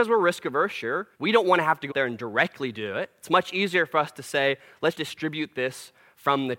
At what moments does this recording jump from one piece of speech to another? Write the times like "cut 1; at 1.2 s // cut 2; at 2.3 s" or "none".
cut 1; at 1.1 s // cut 2; at 1.9 s // cut 3; at 4.9 s

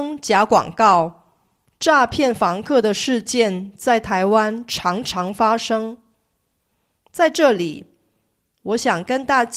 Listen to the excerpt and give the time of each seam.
none

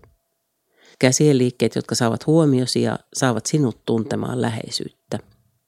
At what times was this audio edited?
none

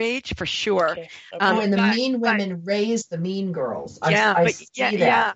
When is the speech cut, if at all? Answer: none

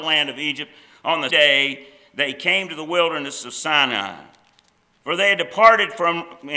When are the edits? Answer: cut 1; at 1.3 s

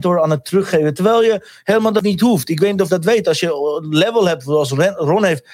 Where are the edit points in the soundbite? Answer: cut 1; at 2.9 s

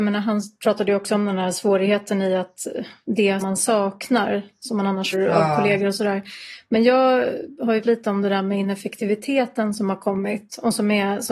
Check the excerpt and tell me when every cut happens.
cut 1; at 3.4 s // cut 2; at 5.1 s // cut 3; at 7.8 s

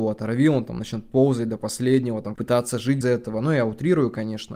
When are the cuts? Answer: cut 1; at 2.4 s // cut 2; at 3.0 s

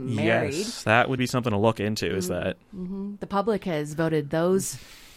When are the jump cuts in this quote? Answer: cut 1; at 1.2 s

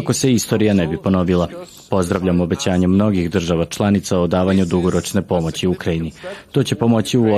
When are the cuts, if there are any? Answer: none

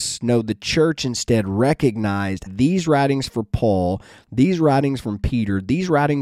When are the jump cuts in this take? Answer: cut 1; at 2.5 s

